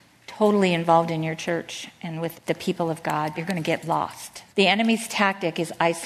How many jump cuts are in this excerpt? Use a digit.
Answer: 3